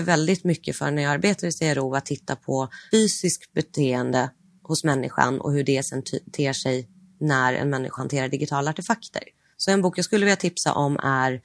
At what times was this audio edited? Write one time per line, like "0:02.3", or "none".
0:02.9
0:08.0